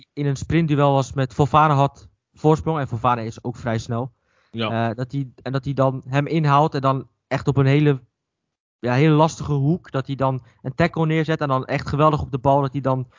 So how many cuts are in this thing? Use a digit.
0